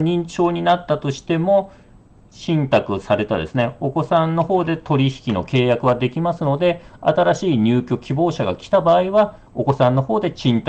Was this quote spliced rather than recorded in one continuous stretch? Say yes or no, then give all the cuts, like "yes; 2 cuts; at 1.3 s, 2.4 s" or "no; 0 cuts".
no; 0 cuts